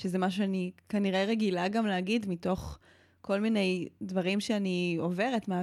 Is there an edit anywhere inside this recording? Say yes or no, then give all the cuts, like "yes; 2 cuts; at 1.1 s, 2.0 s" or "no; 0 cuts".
no; 0 cuts